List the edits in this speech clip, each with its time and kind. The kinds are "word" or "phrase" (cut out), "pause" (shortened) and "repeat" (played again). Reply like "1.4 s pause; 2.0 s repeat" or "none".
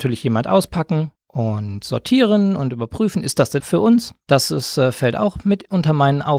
1.2 s pause; 3.6 s word